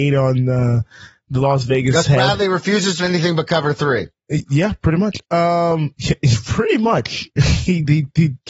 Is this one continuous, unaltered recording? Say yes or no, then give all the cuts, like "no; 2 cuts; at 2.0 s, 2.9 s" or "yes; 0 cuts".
no; 1 cut; at 3.0 s